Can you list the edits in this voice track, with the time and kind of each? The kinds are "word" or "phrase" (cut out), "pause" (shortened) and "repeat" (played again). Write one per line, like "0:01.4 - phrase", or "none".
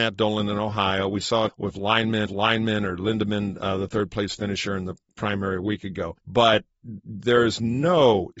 0:01.5 - phrase
0:02.3 - repeat
0:06.2 - pause